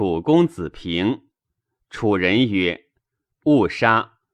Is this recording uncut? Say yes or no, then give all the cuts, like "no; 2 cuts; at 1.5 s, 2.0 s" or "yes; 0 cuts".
yes; 0 cuts